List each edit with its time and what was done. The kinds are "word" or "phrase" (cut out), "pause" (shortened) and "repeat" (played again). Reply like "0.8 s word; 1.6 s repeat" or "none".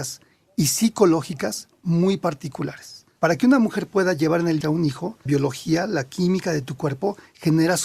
4.6 s word; 5.3 s word